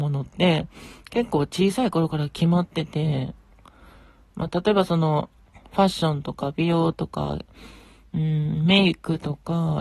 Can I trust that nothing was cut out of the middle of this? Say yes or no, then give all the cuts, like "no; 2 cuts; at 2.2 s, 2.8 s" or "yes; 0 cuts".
yes; 0 cuts